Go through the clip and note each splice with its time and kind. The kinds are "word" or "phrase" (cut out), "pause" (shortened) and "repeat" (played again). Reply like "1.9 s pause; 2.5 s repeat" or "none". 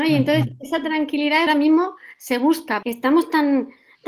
1.5 s phrase; 2.8 s word